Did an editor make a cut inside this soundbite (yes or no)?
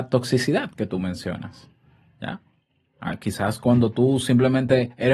yes